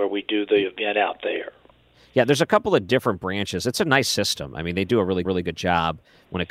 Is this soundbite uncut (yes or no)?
no